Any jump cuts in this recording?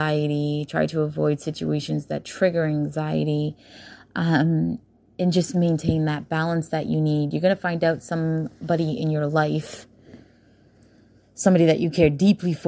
no; 0 cuts

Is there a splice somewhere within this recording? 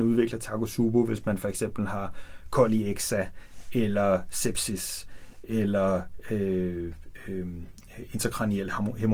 no; 0 cuts

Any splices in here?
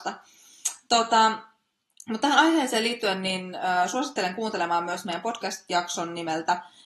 no; 0 cuts

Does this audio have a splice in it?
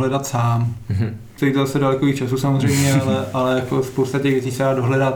yes; 1 cut; at 1.3 s

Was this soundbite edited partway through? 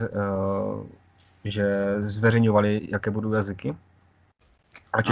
no; 0 cuts

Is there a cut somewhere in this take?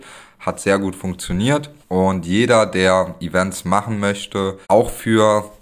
yes; 2 cuts; at 1.8 s, 4.6 s

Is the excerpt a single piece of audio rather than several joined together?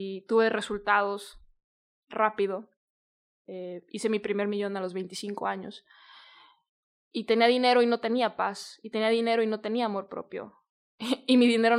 yes; 0 cuts

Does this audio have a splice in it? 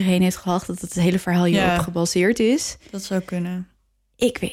no; 0 cuts

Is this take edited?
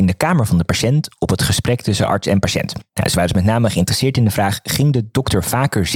no; 0 cuts

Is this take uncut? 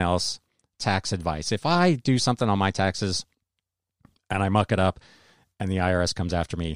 yes; 0 cuts

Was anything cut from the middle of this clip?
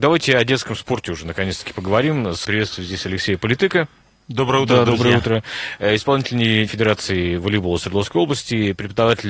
yes; 2 cuts; at 2.4 s, 6.7 s

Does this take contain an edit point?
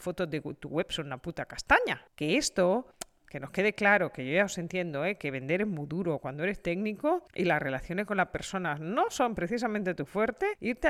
no; 0 cuts

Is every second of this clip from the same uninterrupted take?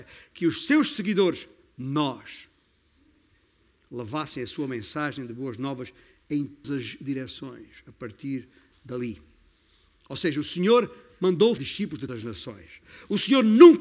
no; 3 cuts; at 6.6 s, 11.6 s, 12.1 s

